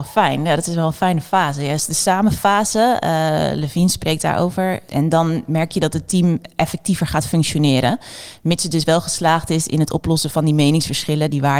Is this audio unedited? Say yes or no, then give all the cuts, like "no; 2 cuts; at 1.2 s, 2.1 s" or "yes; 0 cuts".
yes; 0 cuts